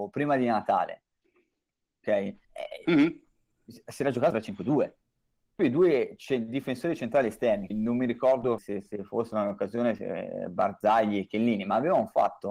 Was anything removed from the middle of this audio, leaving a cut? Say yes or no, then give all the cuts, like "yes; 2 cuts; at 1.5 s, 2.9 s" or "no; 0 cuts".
yes; 5 cuts; at 2.4 s, 4.3 s, 5.6 s, 7.7 s, 8.6 s